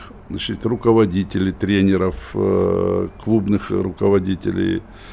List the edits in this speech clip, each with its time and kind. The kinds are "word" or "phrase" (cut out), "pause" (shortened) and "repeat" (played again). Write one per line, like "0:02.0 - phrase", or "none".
none